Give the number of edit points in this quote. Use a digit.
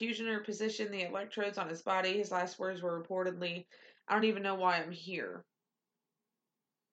0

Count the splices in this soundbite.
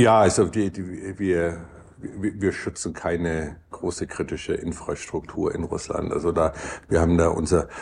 0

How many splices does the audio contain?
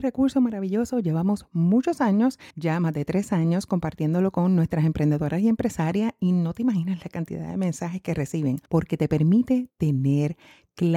2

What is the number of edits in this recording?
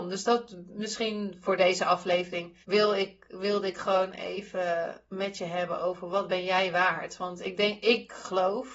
1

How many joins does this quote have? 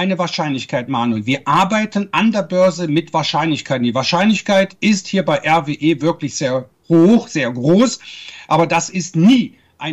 0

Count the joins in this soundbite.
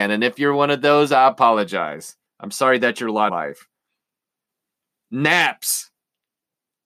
2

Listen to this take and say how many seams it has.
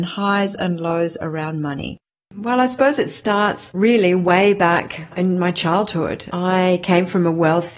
0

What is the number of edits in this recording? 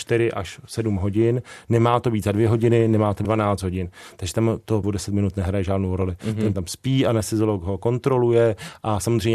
3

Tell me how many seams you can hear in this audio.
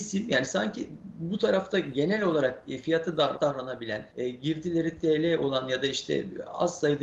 2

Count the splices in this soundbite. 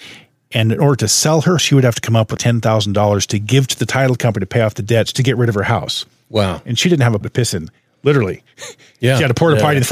4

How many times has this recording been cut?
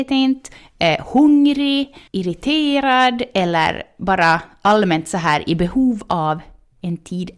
1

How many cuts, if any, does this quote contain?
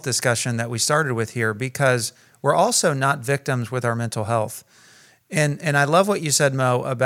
0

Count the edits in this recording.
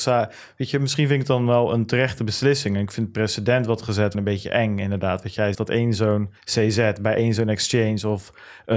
3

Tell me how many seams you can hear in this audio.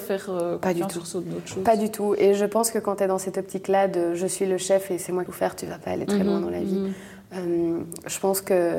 1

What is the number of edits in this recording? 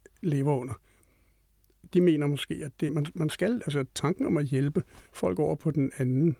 2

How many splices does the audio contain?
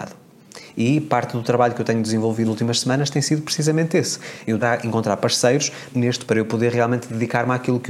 4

